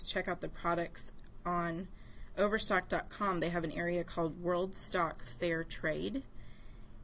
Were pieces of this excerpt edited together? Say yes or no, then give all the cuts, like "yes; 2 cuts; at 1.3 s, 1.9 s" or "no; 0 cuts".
no; 0 cuts